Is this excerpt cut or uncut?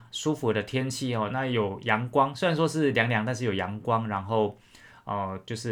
uncut